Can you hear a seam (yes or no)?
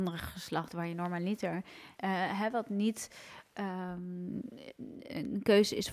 yes